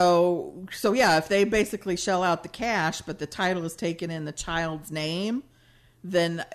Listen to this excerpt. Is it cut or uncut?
uncut